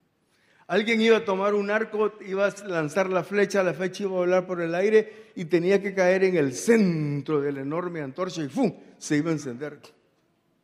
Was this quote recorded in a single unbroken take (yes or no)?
yes